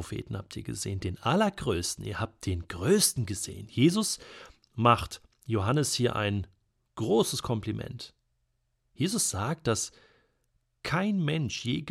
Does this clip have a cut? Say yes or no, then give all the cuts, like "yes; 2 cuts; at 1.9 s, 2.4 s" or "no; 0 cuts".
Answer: no; 0 cuts